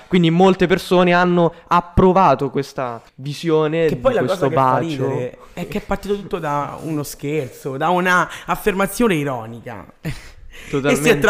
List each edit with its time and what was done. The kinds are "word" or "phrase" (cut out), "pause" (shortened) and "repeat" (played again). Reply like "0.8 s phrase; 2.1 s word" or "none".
3.1 s pause